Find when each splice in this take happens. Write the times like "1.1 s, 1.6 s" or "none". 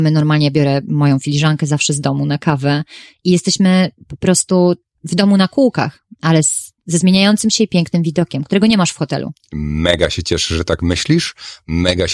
4.9 s, 6.8 s